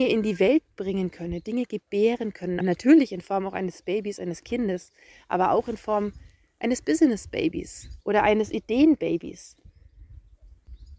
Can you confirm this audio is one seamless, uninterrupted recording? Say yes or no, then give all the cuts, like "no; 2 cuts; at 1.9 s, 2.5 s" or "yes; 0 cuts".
no; 1 cut; at 2.6 s